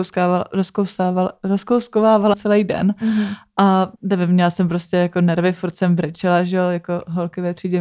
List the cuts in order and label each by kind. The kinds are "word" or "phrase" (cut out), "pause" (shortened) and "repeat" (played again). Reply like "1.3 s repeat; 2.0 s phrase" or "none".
2.3 s word; 4.0 s pause